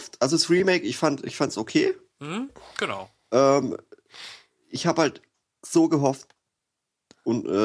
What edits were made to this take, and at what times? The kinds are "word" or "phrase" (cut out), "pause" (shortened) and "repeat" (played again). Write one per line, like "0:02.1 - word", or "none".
none